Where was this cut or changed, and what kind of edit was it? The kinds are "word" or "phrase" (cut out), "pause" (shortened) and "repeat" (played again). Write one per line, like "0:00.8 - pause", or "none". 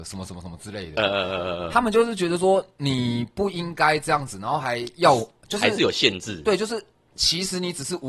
none